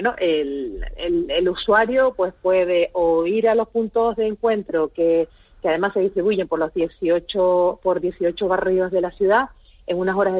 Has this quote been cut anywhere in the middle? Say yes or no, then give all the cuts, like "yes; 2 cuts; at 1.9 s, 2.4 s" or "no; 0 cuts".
no; 0 cuts